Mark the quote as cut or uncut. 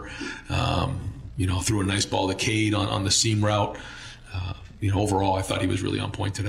uncut